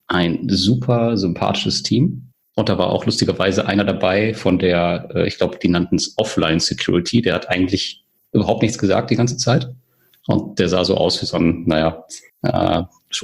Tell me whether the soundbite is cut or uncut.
uncut